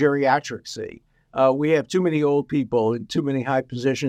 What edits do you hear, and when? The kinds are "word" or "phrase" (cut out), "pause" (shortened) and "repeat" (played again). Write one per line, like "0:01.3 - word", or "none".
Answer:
none